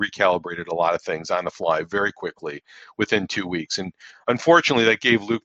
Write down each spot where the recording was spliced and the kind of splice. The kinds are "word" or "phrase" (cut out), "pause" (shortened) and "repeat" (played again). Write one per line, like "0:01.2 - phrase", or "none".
none

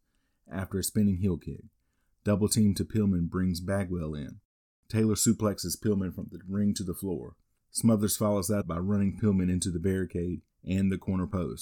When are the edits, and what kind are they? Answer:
0:08.6 - word

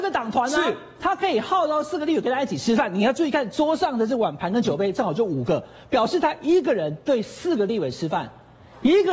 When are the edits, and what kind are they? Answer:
none

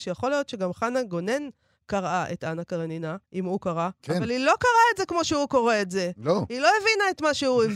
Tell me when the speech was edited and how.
0:03.2 - pause

